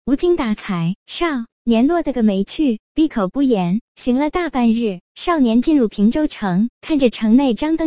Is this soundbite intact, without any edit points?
no; 1 cut; at 2.9 s

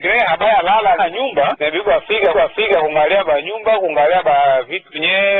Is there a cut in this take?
yes; 2 cuts; at 1.0 s, 2.3 s

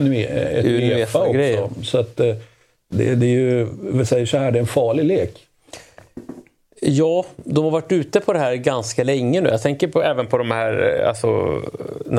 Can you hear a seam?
no; 0 cuts

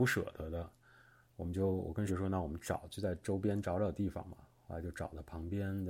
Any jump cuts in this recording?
yes; 1 cut; at 2.1 s

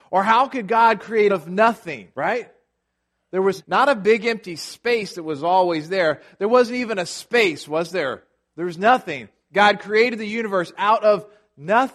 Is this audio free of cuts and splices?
no; 3 cuts; at 1.3 s, 2.1 s, 3.6 s

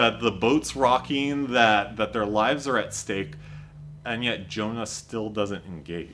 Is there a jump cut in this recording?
no; 0 cuts

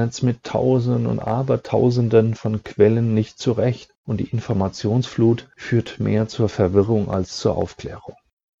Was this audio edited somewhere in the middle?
yes; 1 cut; at 4.0 s

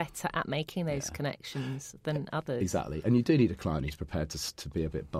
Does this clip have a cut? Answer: no; 0 cuts

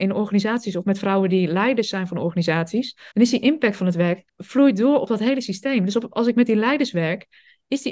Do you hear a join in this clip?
yes; 2 cuts; at 3.1 s, 4.3 s

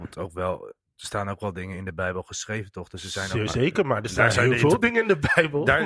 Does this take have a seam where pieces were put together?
no; 0 cuts

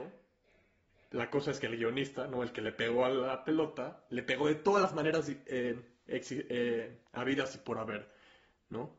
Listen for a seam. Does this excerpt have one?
no; 0 cuts

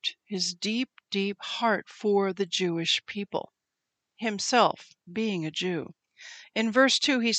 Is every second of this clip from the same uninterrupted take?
yes; 0 cuts

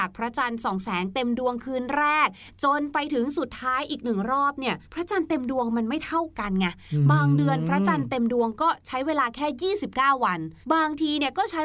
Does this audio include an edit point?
yes; 2 cuts; at 4.8 s, 10.6 s

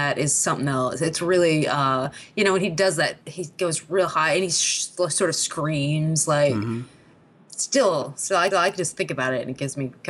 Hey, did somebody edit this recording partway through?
yes; 1 cut; at 8.5 s

